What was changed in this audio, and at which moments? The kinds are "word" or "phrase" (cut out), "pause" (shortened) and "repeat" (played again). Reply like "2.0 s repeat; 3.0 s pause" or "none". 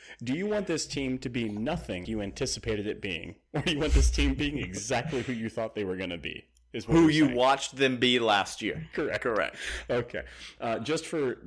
2.0 s word